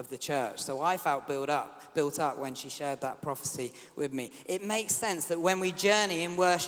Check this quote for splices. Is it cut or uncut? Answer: uncut